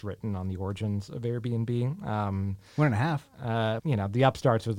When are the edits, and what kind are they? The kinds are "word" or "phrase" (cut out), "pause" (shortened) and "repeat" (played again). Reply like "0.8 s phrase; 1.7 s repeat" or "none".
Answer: 3.8 s word